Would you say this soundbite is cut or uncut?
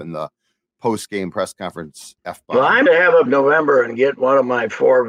cut